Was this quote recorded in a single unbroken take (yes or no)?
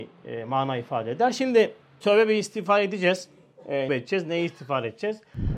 no